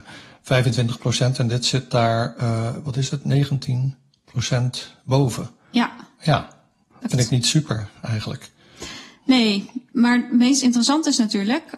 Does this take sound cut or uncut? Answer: cut